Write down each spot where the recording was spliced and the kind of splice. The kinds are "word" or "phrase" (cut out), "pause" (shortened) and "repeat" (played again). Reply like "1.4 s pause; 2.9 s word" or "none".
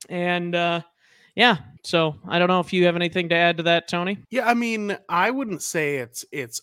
1.8 s pause; 4.2 s pause

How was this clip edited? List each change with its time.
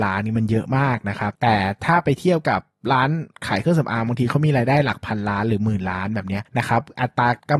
none

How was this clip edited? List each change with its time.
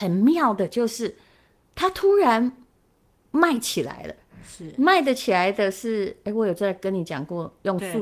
none

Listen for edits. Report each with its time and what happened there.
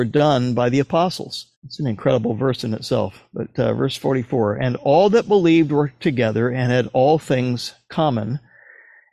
1.6 s pause

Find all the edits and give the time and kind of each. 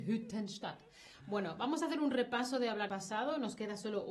2.9 s word

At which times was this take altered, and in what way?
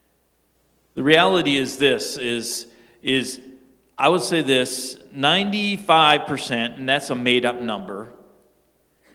none

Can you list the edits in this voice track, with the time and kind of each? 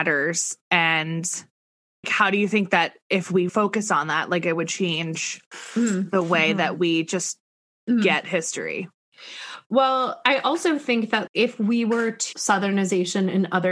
2.0 s word; 3.5 s word; 11.3 s word; 12.3 s word

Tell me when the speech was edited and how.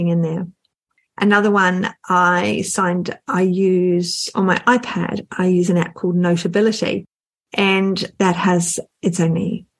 none

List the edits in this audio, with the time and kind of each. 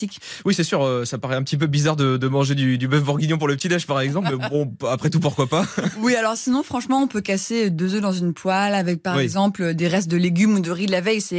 none

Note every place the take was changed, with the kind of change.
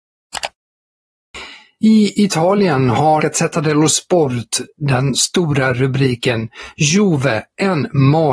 3.2 s word

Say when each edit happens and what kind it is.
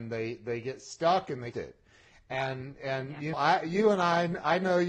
1.5 s phrase; 3.3 s word

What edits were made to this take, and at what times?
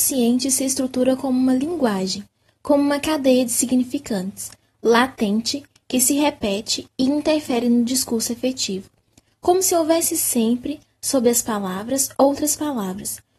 none

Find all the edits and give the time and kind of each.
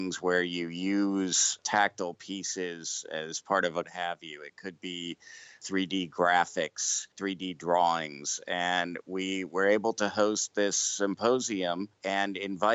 3.8 s phrase

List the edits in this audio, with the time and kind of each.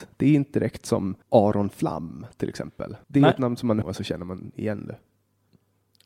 1.2 s pause; 3.0 s pause; 3.8 s phrase

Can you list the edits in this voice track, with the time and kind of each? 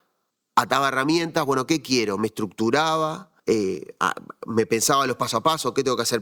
3.4 s pause

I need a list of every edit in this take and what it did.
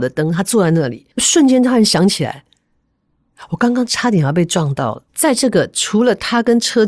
1.1 s pause; 5.1 s pause

